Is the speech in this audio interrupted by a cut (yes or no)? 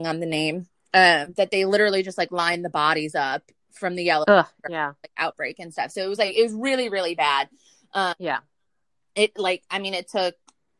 no